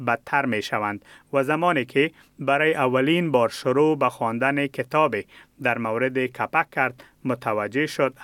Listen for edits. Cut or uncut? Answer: uncut